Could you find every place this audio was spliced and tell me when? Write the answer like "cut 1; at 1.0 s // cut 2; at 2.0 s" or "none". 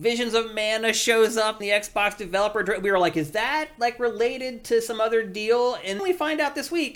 cut 1; at 1.6 s // cut 2; at 6.0 s